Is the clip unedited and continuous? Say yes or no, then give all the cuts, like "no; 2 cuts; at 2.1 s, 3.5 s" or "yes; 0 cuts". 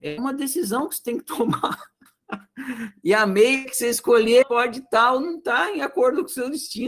no; 1 cut; at 4.4 s